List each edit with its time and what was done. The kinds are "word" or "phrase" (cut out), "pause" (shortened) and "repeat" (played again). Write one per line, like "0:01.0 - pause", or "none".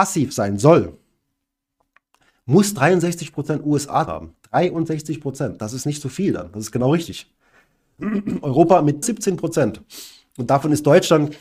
0:04.1 - word
0:09.0 - word